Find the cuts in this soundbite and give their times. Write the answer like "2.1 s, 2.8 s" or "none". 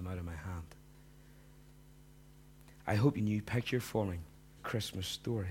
3.2 s, 4.6 s